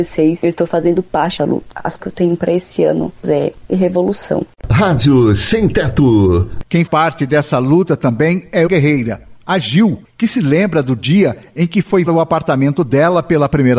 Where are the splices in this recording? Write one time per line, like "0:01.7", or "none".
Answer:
0:01.4
0:02.0
0:03.6
0:06.9
0:08.7
0:12.1